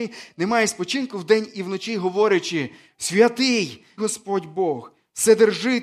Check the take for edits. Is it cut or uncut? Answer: cut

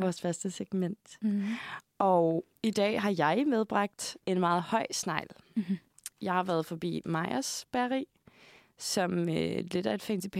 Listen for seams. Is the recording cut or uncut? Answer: cut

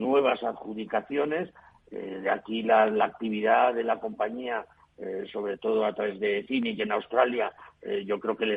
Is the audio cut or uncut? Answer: uncut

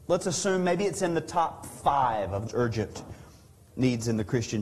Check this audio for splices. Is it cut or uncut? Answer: cut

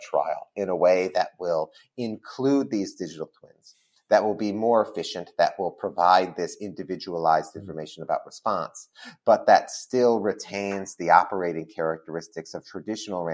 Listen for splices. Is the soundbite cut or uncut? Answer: uncut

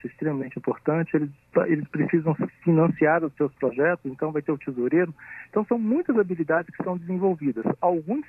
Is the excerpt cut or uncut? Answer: uncut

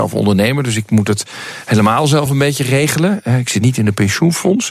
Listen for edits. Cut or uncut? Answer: uncut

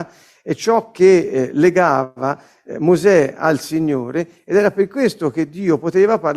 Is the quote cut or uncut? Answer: uncut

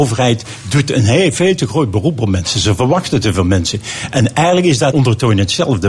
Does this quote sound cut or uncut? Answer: cut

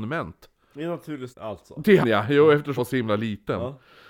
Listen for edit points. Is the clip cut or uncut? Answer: cut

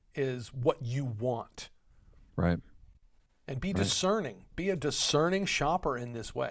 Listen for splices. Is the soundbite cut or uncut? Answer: uncut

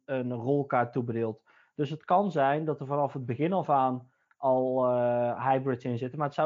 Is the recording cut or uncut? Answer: uncut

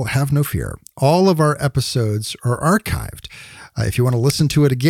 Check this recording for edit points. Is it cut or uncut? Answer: uncut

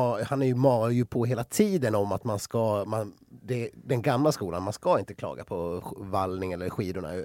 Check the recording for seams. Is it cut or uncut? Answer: uncut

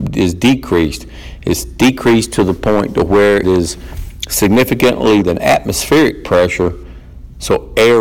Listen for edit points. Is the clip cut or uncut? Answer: cut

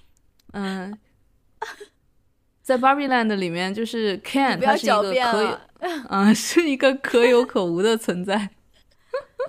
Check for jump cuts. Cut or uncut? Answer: uncut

